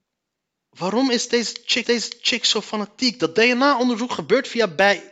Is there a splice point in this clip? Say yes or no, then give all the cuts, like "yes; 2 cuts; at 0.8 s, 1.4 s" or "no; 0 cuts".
yes; 1 cut; at 1.8 s